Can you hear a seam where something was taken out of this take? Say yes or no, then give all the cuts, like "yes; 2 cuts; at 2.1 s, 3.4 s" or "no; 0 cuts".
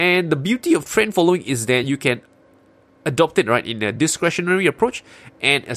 no; 0 cuts